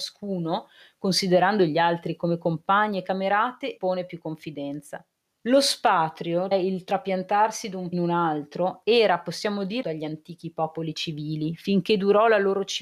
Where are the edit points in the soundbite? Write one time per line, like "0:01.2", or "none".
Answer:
0:03.8
0:05.2
0:06.5
0:07.9
0:09.8